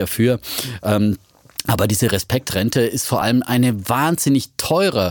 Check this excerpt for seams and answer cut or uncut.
uncut